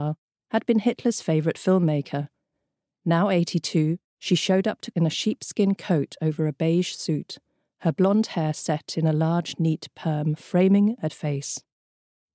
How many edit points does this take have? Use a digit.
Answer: 2